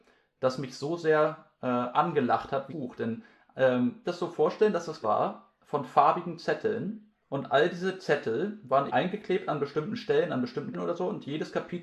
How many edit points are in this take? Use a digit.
7